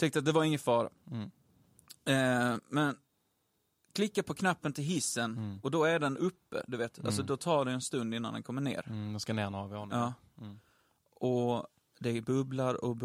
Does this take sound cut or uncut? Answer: uncut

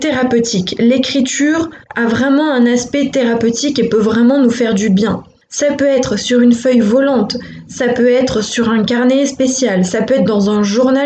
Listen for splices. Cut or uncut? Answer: cut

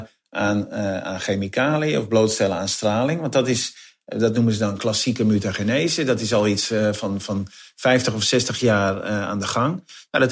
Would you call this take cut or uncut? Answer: uncut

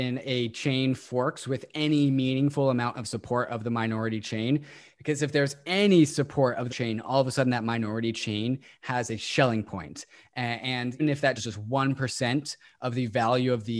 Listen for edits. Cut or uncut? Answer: cut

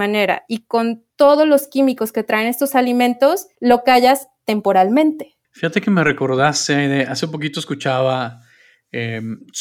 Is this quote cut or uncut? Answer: cut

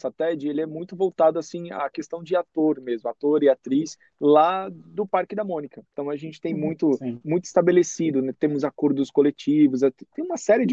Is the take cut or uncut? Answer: cut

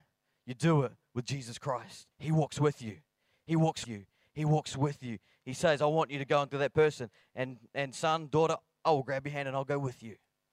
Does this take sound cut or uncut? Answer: cut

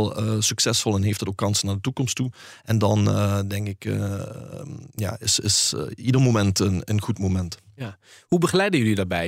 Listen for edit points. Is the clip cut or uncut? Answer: uncut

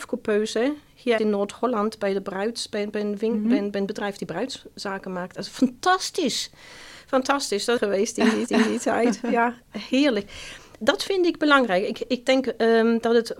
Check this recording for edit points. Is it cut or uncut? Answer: cut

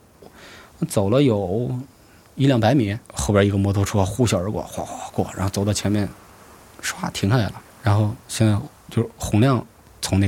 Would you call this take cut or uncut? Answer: cut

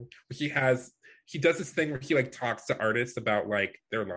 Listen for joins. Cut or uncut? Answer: uncut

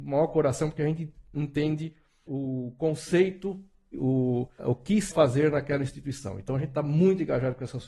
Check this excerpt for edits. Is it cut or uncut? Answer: cut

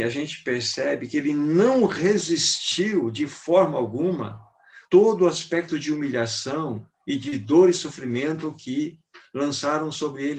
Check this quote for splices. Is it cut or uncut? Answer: cut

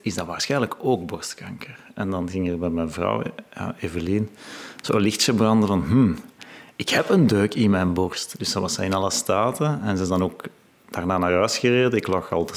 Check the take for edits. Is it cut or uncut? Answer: uncut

